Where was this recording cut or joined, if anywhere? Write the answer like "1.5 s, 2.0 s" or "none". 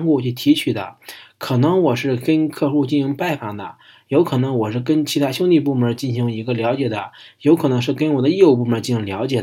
none